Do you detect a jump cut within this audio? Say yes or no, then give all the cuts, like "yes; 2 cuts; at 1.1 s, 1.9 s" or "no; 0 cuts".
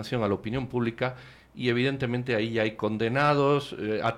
no; 0 cuts